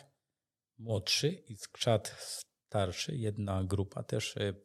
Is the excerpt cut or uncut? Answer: uncut